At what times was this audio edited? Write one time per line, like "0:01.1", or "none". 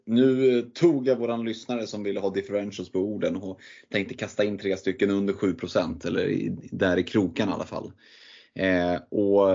none